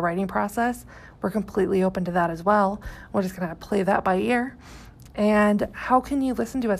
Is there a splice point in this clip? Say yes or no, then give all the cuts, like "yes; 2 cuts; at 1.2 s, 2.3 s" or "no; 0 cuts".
no; 0 cuts